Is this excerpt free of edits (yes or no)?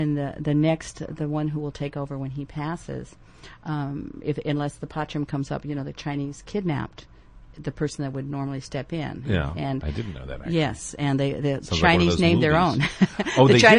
yes